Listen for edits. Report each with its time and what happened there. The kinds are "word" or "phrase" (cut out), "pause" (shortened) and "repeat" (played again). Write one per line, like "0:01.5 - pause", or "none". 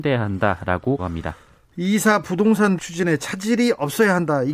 0:01.0 - word
0:02.8 - word